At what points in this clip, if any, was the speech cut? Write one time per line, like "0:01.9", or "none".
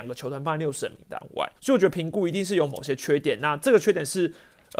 0:01.6